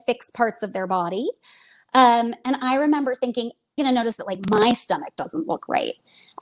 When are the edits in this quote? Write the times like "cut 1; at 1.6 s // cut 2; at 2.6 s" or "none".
cut 1; at 3.8 s